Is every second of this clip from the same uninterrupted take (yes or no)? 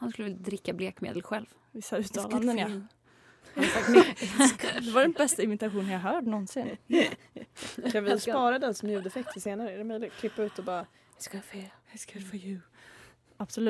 yes